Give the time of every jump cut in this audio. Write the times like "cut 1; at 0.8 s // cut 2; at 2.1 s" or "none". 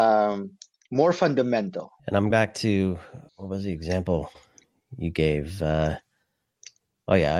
cut 1; at 2.0 s // cut 2; at 2.3 s // cut 3; at 3.3 s